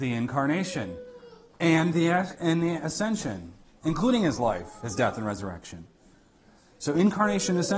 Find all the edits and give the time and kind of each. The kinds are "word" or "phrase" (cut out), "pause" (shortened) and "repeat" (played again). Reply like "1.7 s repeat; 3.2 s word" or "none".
none